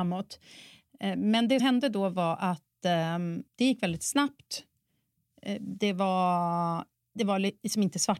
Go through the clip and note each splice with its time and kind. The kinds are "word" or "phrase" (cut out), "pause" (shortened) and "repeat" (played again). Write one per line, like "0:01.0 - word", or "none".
0:01.6 - word
0:03.5 - pause